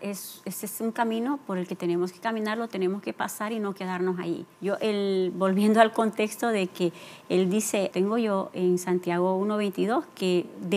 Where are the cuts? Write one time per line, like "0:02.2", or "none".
0:04.5
0:07.9